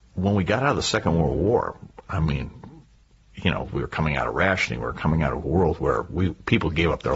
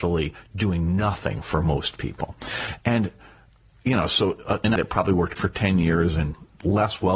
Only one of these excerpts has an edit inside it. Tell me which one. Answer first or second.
second